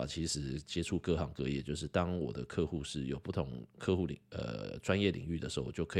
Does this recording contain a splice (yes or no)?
yes